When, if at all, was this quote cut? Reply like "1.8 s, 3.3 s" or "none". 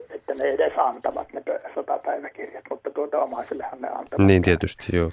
none